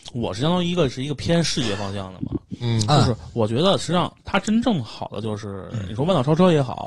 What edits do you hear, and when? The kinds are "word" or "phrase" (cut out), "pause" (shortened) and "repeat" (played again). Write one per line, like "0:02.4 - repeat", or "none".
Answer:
0:04.2 - pause